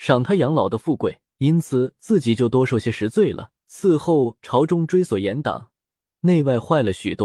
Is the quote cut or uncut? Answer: cut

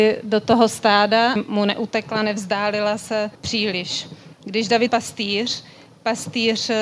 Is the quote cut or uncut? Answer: cut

